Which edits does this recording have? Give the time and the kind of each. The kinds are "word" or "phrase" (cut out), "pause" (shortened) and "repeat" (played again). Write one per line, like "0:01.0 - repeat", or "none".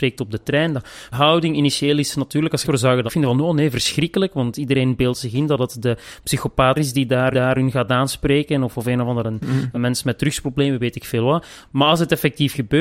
0:01.1 - phrase
0:02.6 - word
0:03.1 - word
0:06.7 - phrase
0:07.3 - repeat
0:09.7 - word